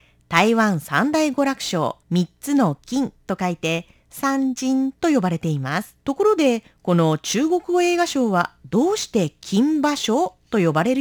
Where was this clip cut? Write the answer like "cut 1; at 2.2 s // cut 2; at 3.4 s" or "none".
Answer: cut 1; at 2.0 s // cut 2; at 5.0 s // cut 3; at 6.0 s